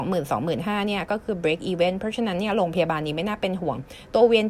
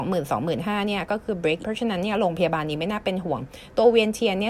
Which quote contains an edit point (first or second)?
second